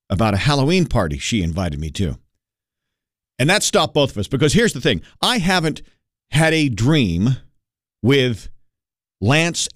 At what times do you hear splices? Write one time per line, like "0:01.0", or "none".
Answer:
none

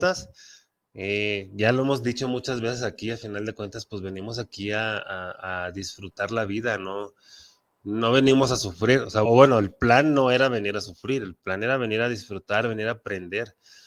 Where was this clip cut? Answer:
0:09.2

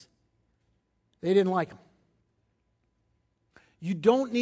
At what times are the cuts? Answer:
none

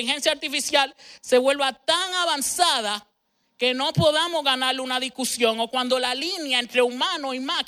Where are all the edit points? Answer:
none

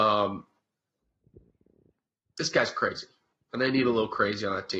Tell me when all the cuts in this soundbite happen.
none

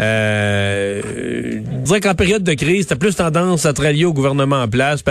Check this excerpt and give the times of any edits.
0:01.9

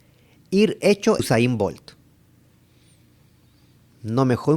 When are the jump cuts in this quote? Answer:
0:01.2

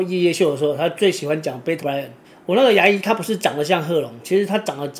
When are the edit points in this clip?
0:01.8
0:02.2

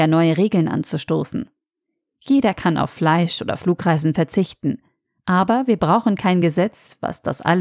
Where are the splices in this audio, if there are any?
none

